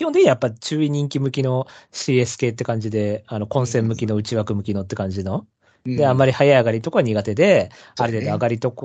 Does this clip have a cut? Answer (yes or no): no